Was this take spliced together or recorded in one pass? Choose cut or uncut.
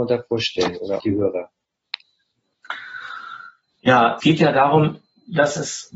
cut